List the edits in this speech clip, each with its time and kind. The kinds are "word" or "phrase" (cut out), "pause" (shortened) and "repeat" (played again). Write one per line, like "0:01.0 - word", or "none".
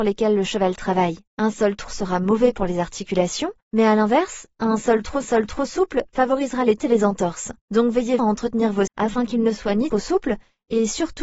0:01.3 - pause
0:01.9 - word
0:03.6 - pause
0:05.2 - repeat
0:06.8 - word
0:07.6 - pause
0:08.2 - word
0:08.9 - word
0:09.9 - phrase